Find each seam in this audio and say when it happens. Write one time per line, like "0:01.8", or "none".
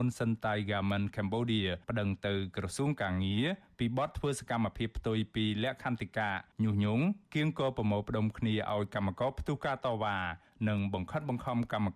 0:01.8
0:06.5

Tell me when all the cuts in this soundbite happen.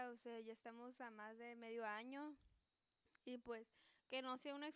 none

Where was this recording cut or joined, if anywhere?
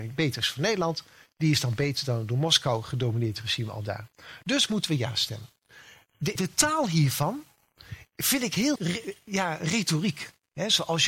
0:06.4
0:08.8

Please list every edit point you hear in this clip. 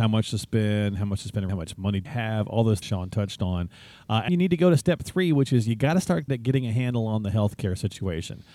0:01.5
0:02.0
0:02.8
0:04.3
0:06.3

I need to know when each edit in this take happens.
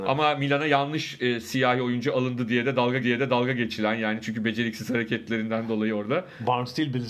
0:03.0

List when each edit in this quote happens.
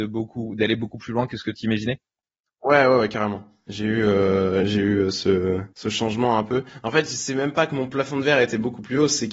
0:05.7

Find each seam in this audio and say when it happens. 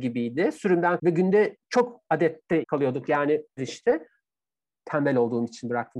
0:01.0
0:02.6
0:03.6

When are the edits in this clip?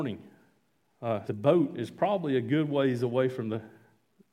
0:01.3

